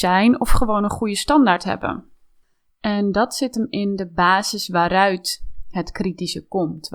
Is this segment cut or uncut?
uncut